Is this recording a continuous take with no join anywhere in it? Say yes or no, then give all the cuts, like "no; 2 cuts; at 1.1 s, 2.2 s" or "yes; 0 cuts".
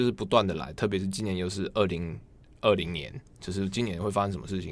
yes; 0 cuts